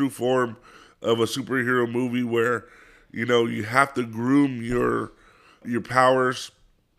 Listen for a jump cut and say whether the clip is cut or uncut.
cut